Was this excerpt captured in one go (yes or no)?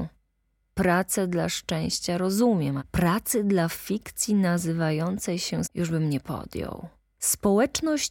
no